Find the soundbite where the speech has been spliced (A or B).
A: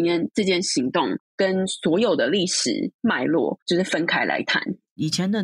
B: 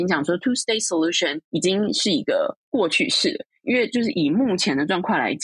B